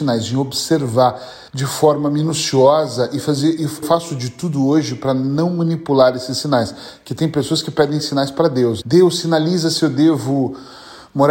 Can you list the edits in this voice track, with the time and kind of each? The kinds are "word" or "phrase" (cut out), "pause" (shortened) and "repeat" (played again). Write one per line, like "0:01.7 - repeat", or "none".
0:01.5 - pause
0:03.8 - phrase
0:08.8 - word